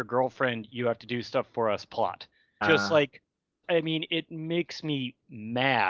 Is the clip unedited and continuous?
no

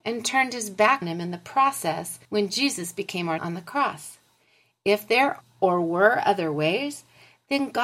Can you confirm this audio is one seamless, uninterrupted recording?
no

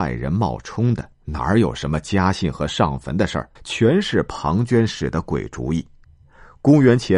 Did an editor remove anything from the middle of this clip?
yes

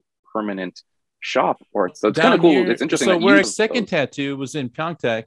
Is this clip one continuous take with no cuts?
no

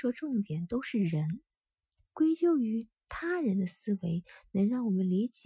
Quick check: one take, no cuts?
no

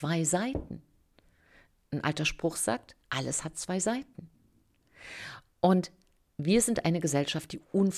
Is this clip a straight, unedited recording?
no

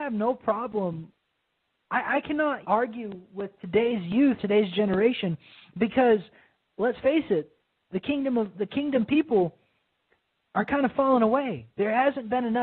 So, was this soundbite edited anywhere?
yes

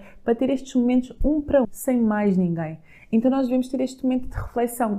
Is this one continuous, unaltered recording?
no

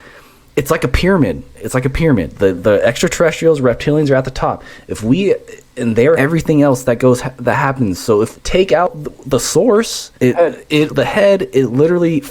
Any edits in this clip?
yes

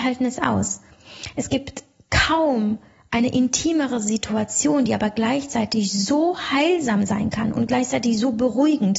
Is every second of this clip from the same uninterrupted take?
yes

